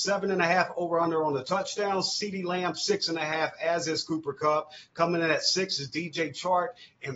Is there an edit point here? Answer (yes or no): no